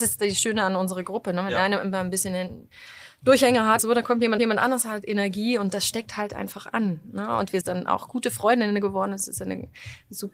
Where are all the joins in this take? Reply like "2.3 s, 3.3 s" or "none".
3.8 s, 4.4 s, 7.6 s